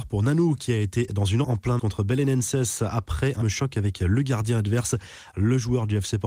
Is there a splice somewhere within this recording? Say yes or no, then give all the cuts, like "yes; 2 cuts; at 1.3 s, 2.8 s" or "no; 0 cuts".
yes; 4 cuts; at 1.1 s, 1.4 s, 1.8 s, 3.4 s